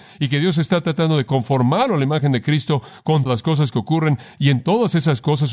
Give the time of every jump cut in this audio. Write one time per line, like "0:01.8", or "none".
0:03.3